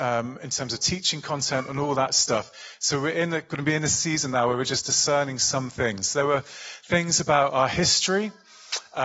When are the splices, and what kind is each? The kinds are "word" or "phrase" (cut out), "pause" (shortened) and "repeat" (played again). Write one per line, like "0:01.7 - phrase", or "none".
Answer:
none